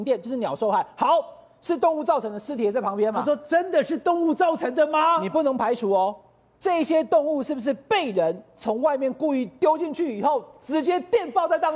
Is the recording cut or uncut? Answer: uncut